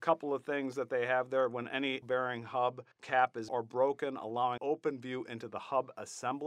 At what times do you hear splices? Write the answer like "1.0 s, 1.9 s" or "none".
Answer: 2.0 s, 2.9 s, 3.5 s, 4.6 s